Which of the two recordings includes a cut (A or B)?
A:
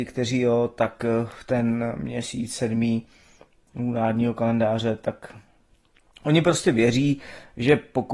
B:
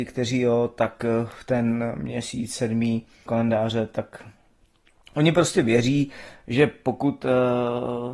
B